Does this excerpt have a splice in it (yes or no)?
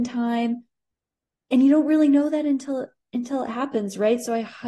no